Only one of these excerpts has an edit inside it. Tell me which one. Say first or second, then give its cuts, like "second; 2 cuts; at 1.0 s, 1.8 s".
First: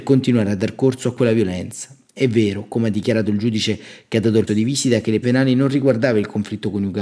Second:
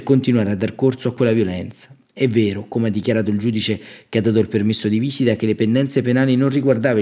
first; 2 cuts; at 4.5 s, 5.2 s